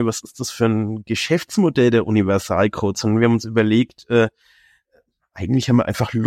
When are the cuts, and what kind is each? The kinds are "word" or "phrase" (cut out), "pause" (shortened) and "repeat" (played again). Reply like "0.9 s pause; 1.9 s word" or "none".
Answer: none